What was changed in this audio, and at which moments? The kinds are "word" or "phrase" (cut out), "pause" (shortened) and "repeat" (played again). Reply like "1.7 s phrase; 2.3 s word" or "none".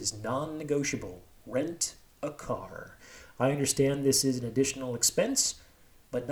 none